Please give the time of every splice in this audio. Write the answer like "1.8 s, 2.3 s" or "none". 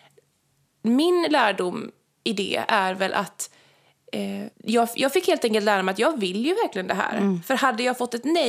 4.5 s